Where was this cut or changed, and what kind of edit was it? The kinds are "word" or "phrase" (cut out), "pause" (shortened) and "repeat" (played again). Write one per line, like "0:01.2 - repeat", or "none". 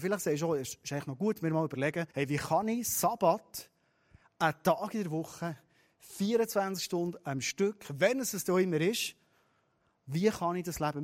0:02.1 - pause